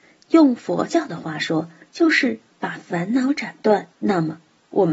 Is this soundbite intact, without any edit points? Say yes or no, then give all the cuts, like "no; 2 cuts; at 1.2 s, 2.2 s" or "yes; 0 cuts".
no; 1 cut; at 3.9 s